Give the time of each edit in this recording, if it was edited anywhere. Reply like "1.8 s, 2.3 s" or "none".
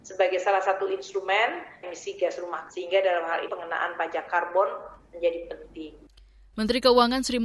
1.8 s, 2.7 s, 3.5 s